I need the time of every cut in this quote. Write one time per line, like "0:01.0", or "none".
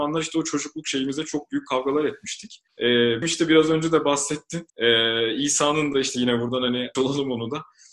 0:02.7
0:03.2
0:04.7
0:06.9